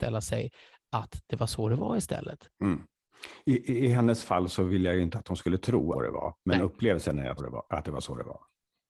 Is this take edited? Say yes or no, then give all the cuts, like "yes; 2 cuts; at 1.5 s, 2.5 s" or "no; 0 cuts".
yes; 4 cuts; at 2.5 s, 5.9 s, 6.4 s, 7.4 s